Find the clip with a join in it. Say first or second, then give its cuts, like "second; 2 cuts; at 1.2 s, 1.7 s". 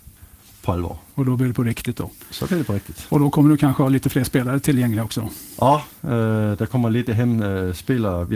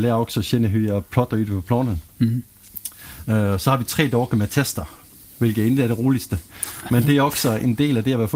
first; 2 cuts; at 1.1 s, 6.0 s